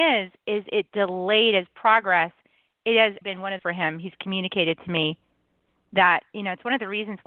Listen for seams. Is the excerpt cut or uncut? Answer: cut